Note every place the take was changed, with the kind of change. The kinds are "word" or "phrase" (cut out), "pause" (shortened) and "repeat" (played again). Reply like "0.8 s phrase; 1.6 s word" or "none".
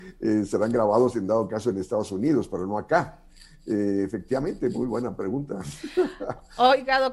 none